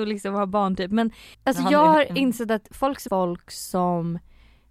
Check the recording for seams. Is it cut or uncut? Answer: cut